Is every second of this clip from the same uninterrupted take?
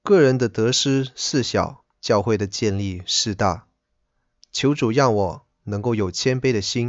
no; 1 cut; at 1.9 s

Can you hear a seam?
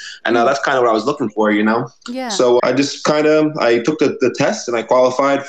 yes; 1 cut; at 2.6 s

